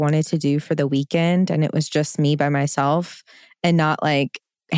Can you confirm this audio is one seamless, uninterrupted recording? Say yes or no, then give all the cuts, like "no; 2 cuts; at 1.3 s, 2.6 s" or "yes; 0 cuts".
yes; 0 cuts